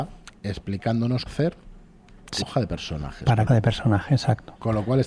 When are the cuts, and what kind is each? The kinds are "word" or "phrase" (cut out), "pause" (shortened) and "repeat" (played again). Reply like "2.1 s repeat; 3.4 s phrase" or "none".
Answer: 1.3 s word; 2.4 s word; 3.5 s phrase